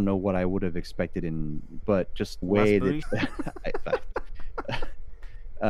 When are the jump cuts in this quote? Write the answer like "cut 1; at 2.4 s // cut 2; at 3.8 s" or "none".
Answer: cut 1; at 1.8 s // cut 2; at 2.4 s // cut 3; at 3.0 s

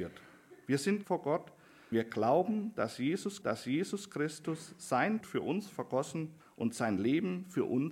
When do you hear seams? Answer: cut 1; at 1.0 s // cut 2; at 1.9 s // cut 3; at 3.4 s // cut 4; at 5.2 s // cut 5; at 6.4 s

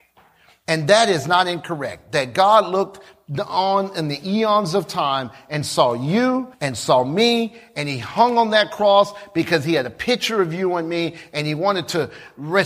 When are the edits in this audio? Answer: cut 1; at 6.5 s

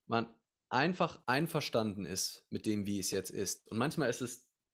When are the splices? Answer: cut 1; at 1.2 s

